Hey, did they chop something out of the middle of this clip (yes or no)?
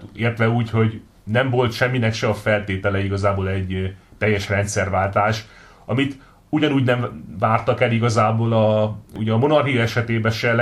no